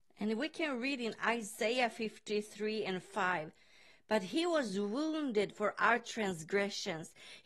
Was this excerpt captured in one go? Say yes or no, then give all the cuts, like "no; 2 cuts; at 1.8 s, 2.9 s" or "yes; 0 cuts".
yes; 0 cuts